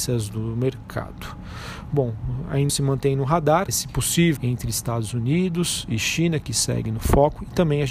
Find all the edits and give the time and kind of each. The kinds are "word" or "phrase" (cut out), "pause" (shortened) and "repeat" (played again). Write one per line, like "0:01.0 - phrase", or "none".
0:02.7 - word
0:03.7 - word
0:04.4 - word